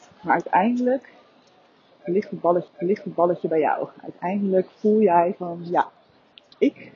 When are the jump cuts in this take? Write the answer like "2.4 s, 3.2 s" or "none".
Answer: 2.7 s